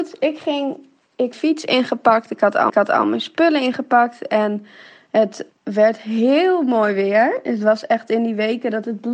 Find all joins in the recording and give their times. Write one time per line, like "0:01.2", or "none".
0:01.3
0:02.7
0:05.5

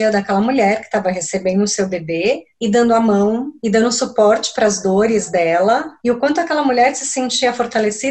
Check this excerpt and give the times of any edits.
0:03.6
0:06.0

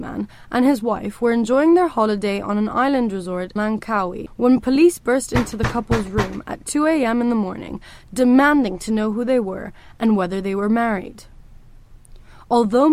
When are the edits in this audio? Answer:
0:03.6

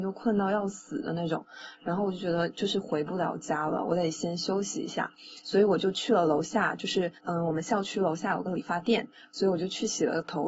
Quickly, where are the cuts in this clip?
0:07.2

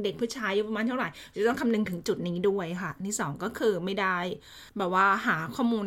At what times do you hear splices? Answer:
0:04.7

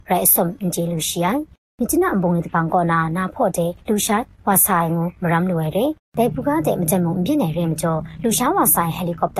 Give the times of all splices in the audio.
0:03.8

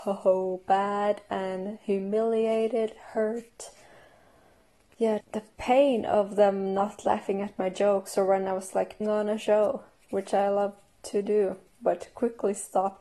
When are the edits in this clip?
0:05.2
0:09.0

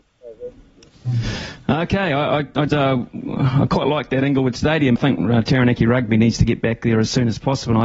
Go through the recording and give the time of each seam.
0:02.7
0:05.0

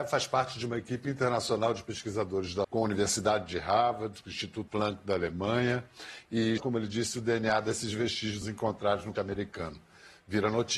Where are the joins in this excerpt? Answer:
0:02.6
0:04.7
0:06.6
0:08.4
0:09.2

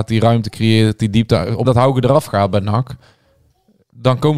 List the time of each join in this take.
0:01.6

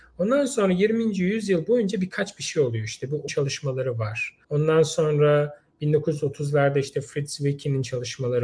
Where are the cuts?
0:03.3
0:04.4

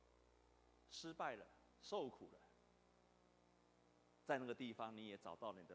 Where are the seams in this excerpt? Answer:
0:01.7

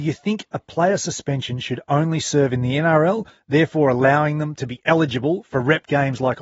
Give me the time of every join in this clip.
none

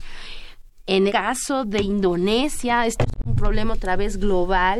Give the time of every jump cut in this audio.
0:01.1

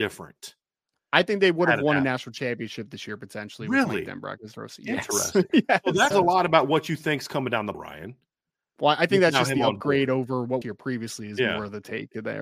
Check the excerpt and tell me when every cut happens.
0:06.1
0:07.7
0:10.6

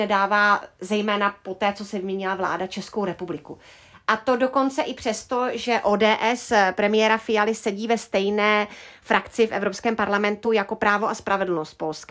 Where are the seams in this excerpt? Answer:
none

